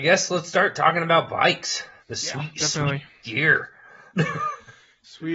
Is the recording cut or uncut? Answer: cut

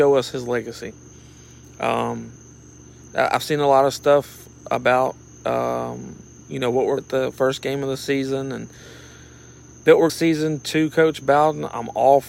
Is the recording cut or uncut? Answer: cut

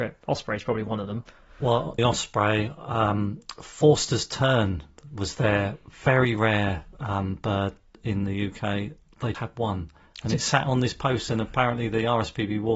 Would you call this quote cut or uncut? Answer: cut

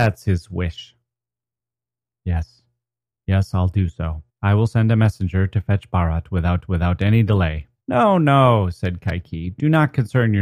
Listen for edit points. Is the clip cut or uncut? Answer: cut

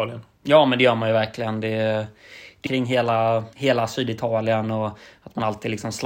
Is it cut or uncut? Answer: cut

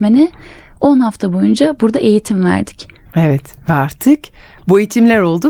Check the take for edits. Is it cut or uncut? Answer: uncut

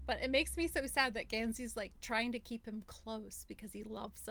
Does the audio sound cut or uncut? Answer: uncut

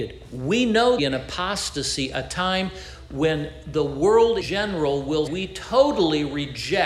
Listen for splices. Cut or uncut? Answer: cut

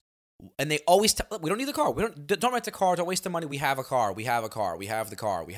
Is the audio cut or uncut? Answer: uncut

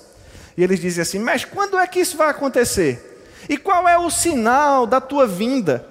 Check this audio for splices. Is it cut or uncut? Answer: uncut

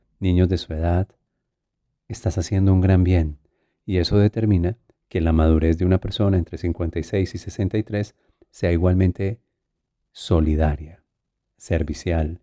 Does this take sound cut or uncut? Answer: uncut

